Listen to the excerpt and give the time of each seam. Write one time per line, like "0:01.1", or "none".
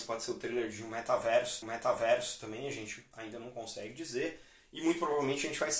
0:01.6